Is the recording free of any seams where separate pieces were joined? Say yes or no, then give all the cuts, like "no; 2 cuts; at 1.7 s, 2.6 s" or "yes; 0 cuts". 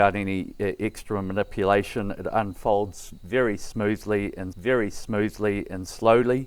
no; 1 cut; at 4.5 s